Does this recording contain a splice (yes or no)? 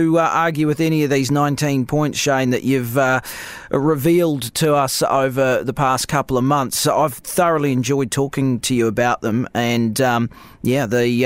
no